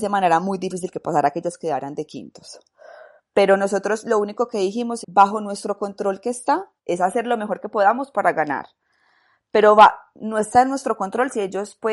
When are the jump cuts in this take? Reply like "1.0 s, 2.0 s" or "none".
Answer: 5.0 s, 6.8 s